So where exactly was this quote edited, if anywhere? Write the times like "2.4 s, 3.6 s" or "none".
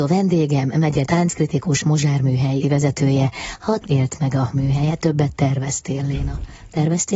1.0 s, 1.8 s, 2.6 s, 3.8 s, 4.5 s, 5.0 s